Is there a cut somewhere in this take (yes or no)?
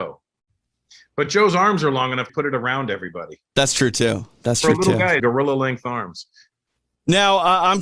yes